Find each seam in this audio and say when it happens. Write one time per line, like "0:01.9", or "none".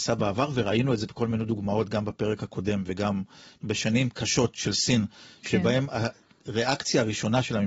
none

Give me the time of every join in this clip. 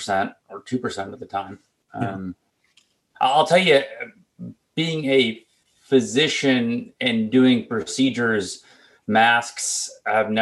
none

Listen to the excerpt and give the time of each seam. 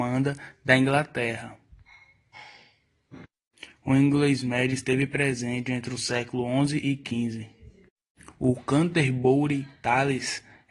none

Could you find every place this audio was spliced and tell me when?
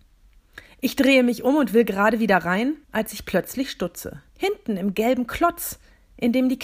0:02.8
0:04.3

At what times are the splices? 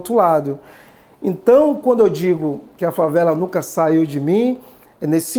none

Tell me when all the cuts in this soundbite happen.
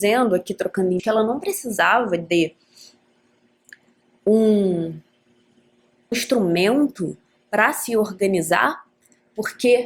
0:01.0
0:06.1

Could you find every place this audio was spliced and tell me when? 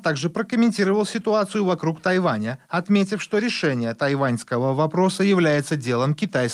none

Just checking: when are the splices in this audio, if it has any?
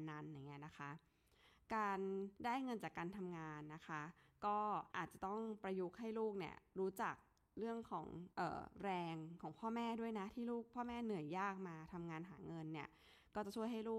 0:02.4
0:04.9
0:08.3

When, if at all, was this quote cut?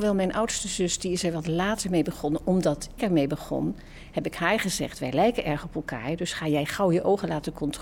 0:03.0

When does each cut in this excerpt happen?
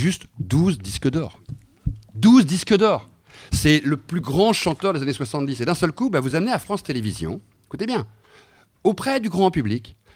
none

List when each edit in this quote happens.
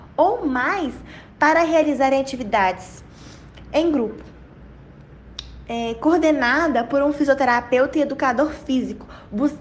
0:01.3

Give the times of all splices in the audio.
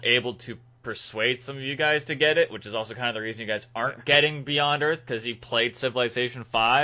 none

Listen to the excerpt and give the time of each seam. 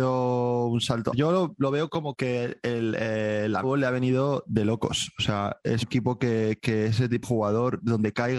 0:01.1
0:02.1
0:03.6
0:05.8
0:07.2

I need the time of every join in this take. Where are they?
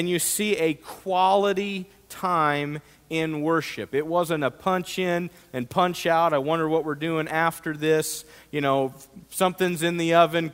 0:09.2

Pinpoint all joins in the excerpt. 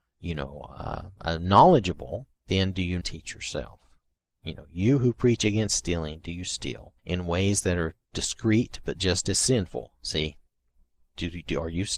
0:02.4
0:03.0
0:07.0

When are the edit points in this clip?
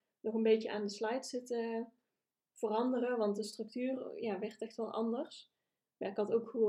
none

